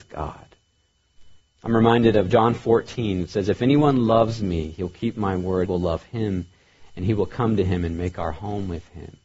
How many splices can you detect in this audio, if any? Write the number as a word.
two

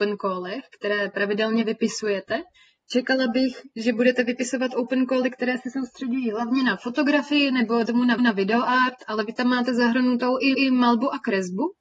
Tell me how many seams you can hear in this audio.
three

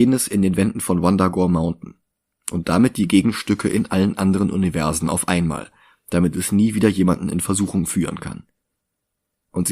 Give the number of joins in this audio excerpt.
zero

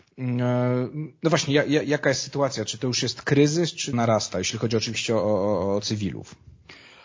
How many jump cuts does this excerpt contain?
one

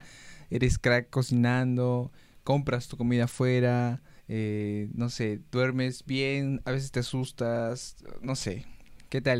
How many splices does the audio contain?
one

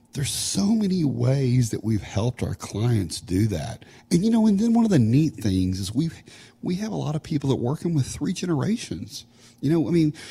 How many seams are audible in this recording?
zero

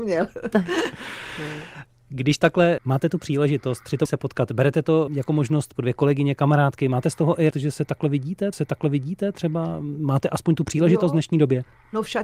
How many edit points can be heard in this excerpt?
six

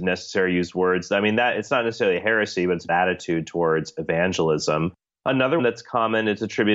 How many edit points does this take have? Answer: two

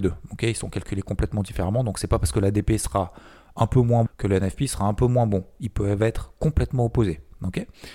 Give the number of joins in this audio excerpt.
one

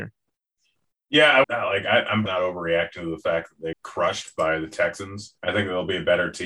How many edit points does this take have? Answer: four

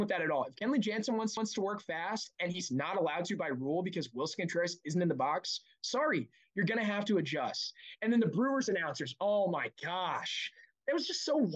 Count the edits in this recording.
one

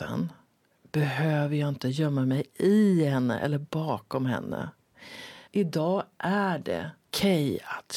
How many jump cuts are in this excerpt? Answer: one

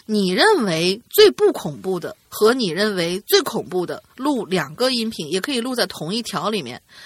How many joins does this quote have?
two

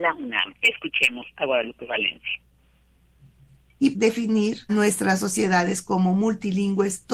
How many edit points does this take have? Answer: two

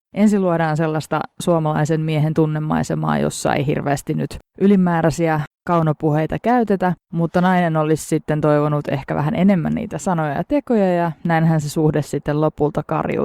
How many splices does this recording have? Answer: zero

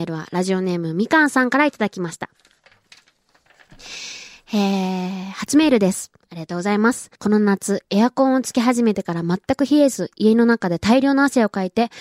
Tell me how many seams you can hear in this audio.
one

